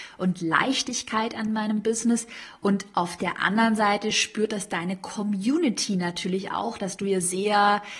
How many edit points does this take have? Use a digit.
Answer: 0